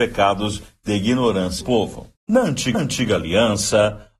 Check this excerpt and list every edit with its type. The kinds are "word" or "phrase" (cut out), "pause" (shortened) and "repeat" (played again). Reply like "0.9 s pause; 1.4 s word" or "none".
1.6 s word; 2.2 s pause; 2.7 s repeat